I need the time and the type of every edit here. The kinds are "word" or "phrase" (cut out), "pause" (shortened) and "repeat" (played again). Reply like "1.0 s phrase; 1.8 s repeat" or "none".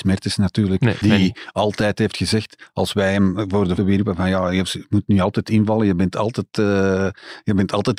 1.0 s word; 3.8 s word